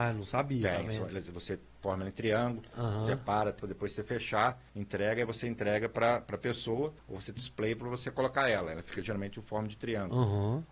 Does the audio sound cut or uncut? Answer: cut